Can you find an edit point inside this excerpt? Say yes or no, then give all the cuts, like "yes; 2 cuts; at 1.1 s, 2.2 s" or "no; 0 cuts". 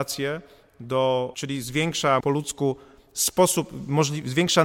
yes; 2 cuts; at 1.3 s, 2.2 s